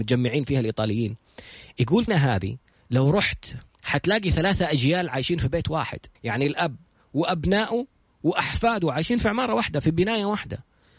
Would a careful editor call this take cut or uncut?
cut